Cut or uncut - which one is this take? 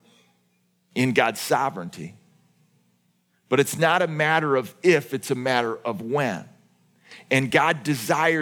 uncut